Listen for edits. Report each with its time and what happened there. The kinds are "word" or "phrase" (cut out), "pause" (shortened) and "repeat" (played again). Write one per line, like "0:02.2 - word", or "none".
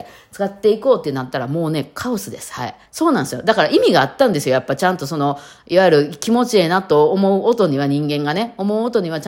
0:02.9 - pause